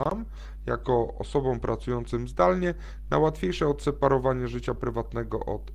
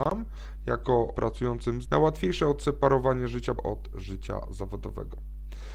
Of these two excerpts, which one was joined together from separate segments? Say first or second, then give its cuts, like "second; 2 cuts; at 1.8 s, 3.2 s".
second; 3 cuts; at 1.1 s, 1.8 s, 3.6 s